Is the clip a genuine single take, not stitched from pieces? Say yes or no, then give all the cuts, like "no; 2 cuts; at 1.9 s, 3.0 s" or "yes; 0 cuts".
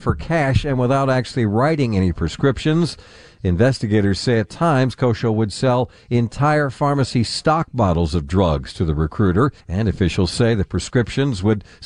no; 1 cut; at 9.6 s